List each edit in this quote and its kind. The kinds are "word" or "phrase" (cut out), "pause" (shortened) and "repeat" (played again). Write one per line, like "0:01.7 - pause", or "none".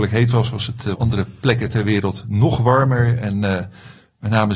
0:00.9 - word